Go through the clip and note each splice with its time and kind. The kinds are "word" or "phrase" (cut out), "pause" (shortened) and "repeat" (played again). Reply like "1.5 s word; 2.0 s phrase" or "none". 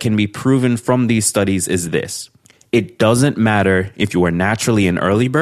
none